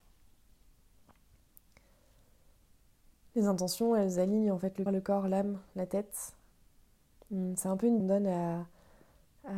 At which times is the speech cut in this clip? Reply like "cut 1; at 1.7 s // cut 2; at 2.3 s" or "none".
cut 1; at 4.9 s // cut 2; at 8.0 s